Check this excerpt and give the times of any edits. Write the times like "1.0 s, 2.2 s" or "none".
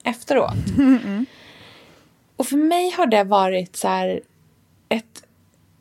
none